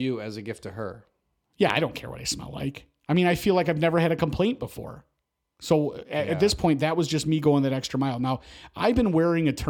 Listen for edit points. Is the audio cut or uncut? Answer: uncut